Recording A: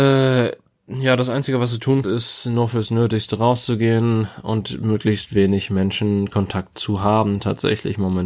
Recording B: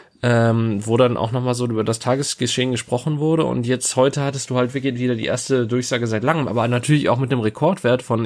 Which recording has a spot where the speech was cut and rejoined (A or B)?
A